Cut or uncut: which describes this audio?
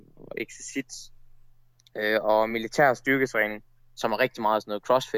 uncut